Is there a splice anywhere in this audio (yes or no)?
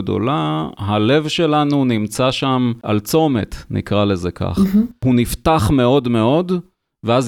no